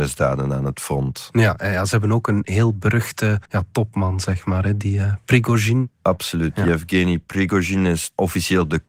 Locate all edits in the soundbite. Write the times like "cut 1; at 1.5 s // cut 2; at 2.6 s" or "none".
cut 1; at 3.5 s